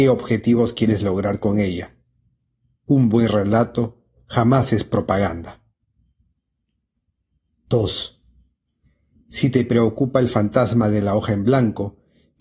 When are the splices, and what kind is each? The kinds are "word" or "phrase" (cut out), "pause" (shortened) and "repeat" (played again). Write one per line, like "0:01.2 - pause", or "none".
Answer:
none